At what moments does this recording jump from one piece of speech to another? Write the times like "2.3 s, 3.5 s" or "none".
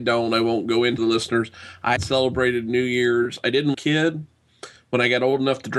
1.0 s, 2.0 s, 3.7 s

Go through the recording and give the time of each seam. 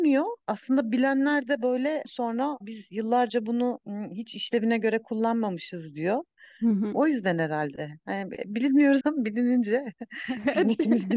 2.0 s, 2.6 s, 9.0 s

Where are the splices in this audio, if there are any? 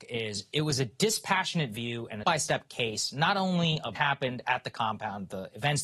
2.2 s, 4.0 s

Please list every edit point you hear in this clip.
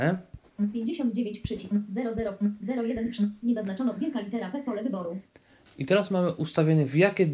none

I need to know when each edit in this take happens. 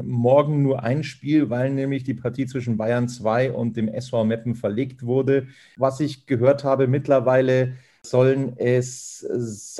none

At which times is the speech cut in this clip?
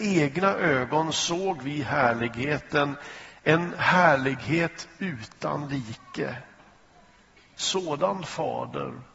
none

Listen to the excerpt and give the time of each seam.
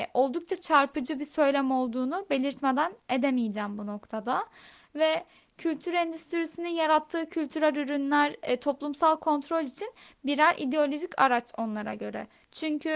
none

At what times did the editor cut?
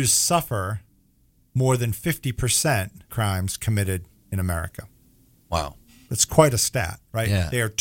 3.1 s

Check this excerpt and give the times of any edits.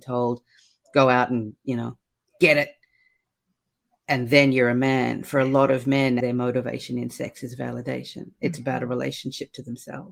6.2 s

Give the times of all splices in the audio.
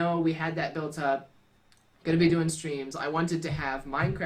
none

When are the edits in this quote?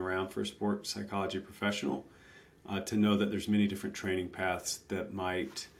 none

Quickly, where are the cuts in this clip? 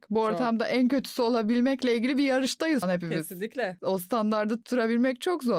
2.8 s

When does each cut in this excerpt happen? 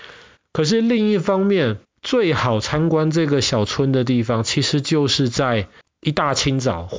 1.9 s, 5.8 s

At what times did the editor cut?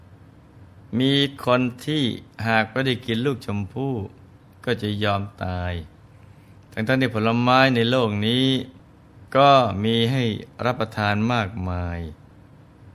9.3 s

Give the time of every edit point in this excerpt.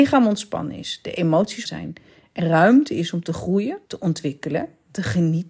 1.7 s, 2.4 s, 3.8 s

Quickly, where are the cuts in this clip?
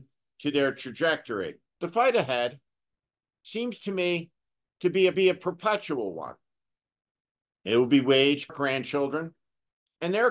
1.7 s, 5.1 s, 8.5 s

